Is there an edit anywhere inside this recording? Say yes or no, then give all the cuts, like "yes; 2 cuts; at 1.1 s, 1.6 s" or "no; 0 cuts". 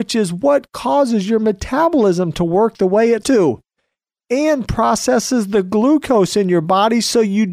yes; 1 cut; at 3.2 s